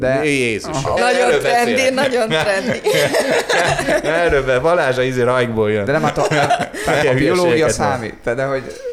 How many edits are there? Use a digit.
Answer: 2